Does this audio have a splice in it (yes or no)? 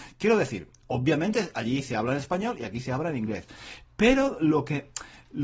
no